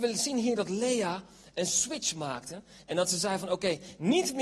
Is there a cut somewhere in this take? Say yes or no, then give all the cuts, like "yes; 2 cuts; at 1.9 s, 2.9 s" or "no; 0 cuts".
no; 0 cuts